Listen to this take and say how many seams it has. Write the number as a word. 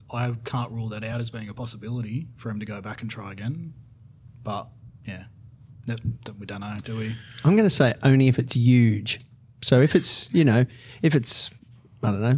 zero